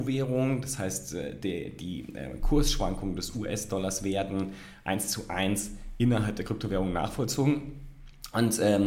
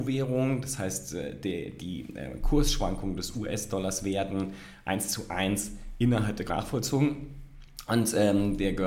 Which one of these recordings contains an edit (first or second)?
second